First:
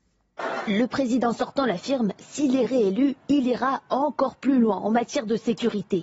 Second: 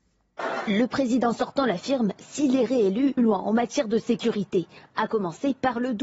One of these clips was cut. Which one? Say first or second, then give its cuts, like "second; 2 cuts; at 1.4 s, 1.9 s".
second; 1 cut; at 3.2 s